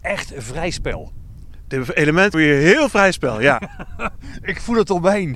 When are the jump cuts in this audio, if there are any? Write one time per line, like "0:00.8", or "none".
0:02.3
0:02.9